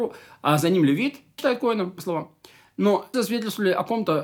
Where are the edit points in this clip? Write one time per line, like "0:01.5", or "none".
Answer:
0:01.4
0:02.0
0:03.1